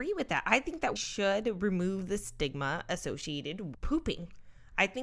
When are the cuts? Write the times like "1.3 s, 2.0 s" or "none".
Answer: 1.0 s, 3.7 s